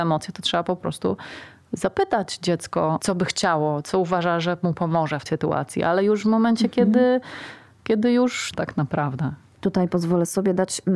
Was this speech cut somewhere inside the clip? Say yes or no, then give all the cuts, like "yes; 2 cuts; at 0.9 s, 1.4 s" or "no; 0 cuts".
yes; 2 cuts; at 5.3 s, 8.5 s